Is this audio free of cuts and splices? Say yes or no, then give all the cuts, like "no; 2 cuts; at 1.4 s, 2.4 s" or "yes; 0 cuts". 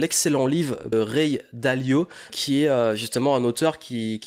no; 2 cuts; at 0.9 s, 2.3 s